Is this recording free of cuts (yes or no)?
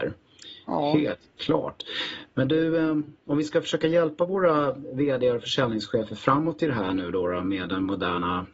yes